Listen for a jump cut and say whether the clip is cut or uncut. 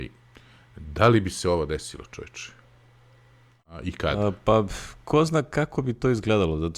uncut